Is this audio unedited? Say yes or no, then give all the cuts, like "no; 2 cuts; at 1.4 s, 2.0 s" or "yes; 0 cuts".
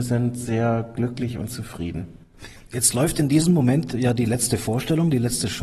yes; 0 cuts